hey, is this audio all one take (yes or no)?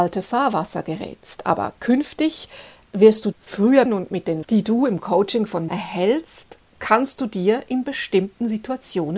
no